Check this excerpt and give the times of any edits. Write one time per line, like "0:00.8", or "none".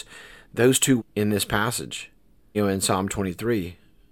0:01.0
0:02.5

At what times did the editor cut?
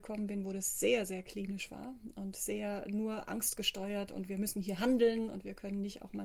none

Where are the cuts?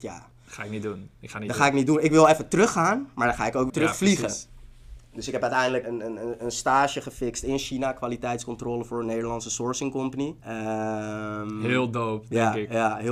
0:03.7
0:05.8
0:10.4

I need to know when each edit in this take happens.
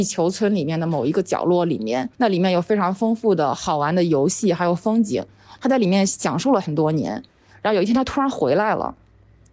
0:02.1

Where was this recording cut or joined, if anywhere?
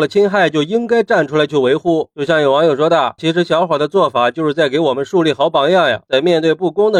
0:03.2

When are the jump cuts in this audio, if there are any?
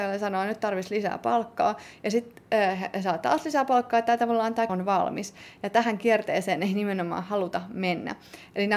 0:04.7

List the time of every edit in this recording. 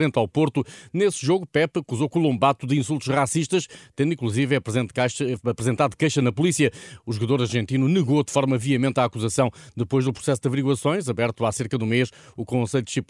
none

